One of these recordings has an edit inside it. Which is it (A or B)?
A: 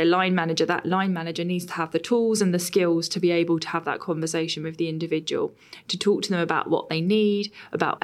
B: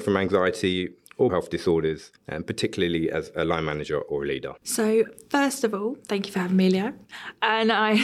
B